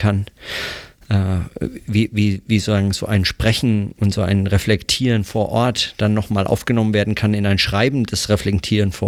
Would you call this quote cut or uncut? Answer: uncut